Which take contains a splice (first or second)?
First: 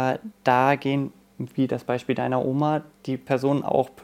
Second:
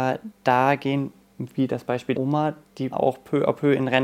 second